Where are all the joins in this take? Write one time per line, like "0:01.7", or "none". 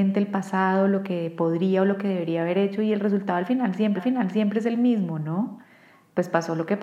0:04.0